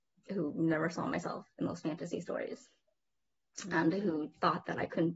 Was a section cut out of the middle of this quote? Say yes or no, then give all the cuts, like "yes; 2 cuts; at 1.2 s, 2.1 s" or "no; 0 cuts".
no; 0 cuts